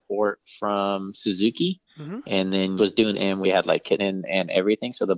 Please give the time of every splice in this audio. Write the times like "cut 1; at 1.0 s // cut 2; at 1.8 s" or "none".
cut 1; at 1.9 s // cut 2; at 2.8 s // cut 3; at 3.1 s // cut 4; at 3.4 s // cut 5; at 4.0 s